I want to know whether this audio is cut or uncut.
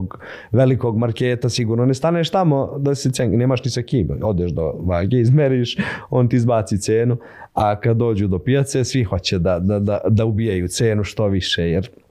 uncut